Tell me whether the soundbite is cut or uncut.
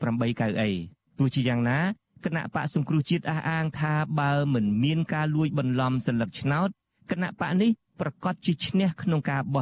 cut